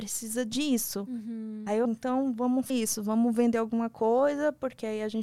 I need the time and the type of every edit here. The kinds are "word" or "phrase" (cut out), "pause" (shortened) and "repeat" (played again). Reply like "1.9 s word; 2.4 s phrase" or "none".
1.8 s word; 2.7 s word